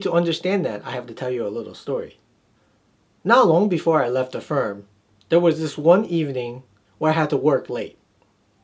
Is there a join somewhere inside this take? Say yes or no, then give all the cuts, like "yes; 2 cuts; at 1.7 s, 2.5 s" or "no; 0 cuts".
no; 0 cuts